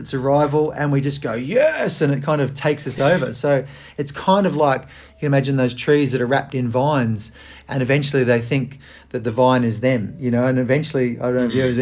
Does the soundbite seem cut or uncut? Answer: uncut